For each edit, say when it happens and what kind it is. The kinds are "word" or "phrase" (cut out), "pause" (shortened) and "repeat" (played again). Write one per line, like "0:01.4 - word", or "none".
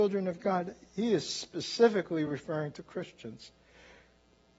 none